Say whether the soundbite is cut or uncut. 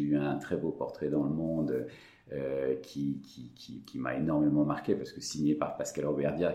uncut